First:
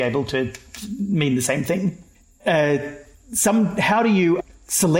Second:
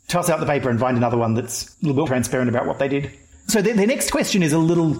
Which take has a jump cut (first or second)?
second